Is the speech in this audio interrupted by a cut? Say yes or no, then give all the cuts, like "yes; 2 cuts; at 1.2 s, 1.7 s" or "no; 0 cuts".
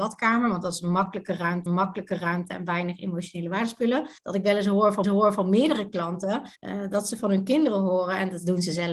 yes; 4 cuts; at 1.7 s, 4.2 s, 5.0 s, 6.6 s